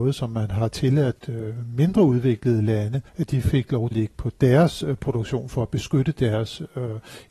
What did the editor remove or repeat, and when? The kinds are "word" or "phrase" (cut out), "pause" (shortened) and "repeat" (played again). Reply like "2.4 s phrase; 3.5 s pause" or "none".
1.2 s word; 3.1 s pause; 3.9 s phrase